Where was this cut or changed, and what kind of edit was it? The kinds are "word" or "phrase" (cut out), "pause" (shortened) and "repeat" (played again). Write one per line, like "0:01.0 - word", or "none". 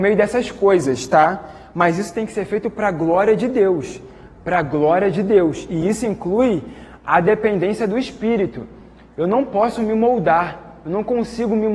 none